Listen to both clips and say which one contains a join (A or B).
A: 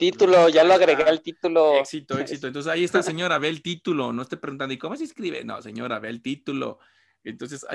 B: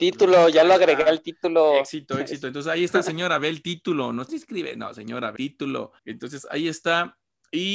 B